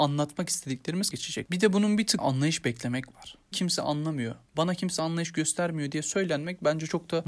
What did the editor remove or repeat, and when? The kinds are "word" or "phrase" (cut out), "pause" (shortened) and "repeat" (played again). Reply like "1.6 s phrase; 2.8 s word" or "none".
1.1 s word; 2.2 s word; 3.5 s phrase